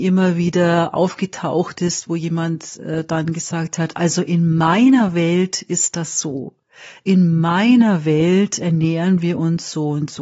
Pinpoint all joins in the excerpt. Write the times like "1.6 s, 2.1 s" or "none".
none